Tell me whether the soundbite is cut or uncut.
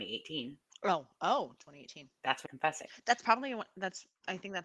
cut